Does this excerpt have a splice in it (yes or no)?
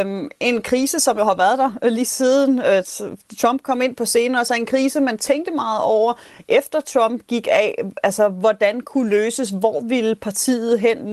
no